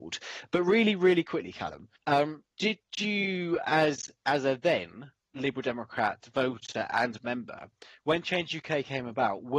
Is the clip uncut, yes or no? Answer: no